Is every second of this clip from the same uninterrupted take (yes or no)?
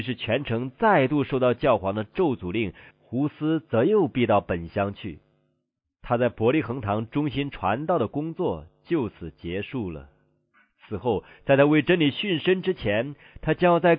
yes